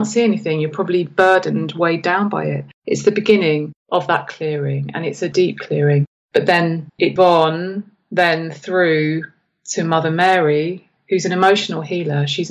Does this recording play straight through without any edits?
no; 3 cuts; at 2.7 s, 3.8 s, 7.2 s

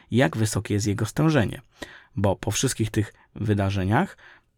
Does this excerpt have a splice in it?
no; 0 cuts

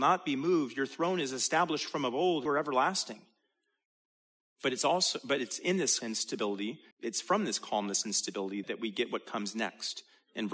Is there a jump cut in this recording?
yes; 4 cuts; at 2.5 s, 6.0 s, 6.9 s, 8.6 s

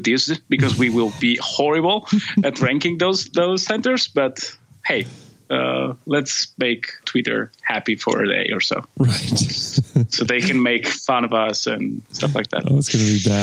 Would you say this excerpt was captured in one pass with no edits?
no; 2 cuts; at 1.2 s, 7.0 s

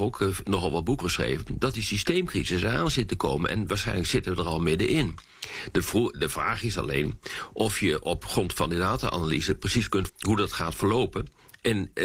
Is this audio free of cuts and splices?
no; 2 cuts; at 1.0 s, 10.1 s

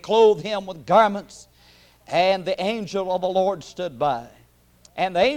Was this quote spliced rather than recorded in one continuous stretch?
no; 0 cuts

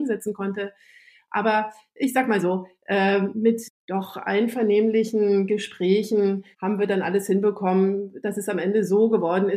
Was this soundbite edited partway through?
yes; 1 cut; at 6.5 s

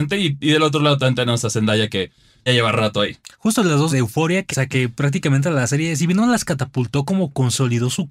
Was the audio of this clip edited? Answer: yes; 3 cuts; at 2.5 s, 3.9 s, 4.5 s

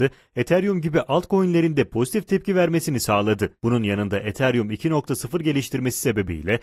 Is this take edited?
yes; 1 cut; at 3.6 s

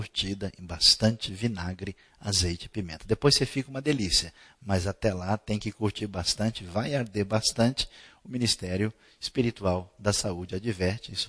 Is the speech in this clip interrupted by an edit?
no; 0 cuts

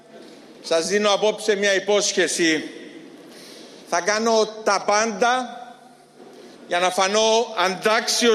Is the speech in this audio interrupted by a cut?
yes; 2 cuts; at 3.8 s, 6.5 s

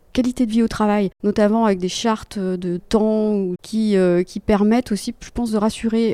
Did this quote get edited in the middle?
yes; 3 cuts; at 1.1 s, 2.8 s, 3.6 s

